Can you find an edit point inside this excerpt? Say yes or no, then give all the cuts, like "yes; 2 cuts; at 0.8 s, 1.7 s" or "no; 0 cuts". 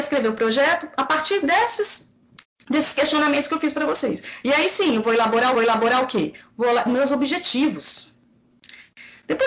yes; 3 cuts; at 2.4 s, 5.5 s, 6.9 s